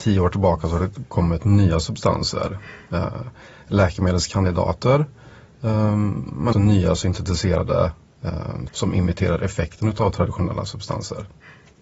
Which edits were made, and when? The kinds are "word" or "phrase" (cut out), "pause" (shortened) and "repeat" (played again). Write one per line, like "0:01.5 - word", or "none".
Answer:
0:01.4 - word
0:06.5 - word
0:08.7 - word